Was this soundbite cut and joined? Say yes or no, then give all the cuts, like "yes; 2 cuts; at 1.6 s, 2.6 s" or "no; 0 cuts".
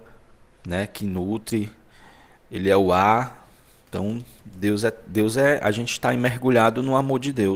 no; 0 cuts